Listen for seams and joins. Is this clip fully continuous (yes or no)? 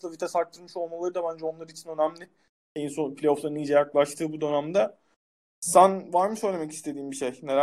yes